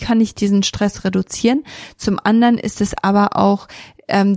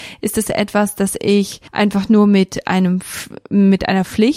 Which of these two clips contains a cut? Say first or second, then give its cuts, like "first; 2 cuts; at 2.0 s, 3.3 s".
second; 1 cut; at 1.7 s